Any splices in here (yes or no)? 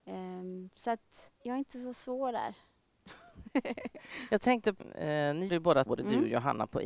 yes